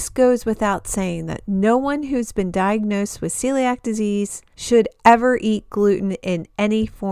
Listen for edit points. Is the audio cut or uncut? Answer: uncut